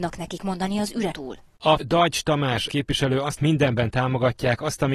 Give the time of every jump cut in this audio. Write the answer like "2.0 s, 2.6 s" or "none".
1.1 s, 1.8 s, 2.7 s, 3.4 s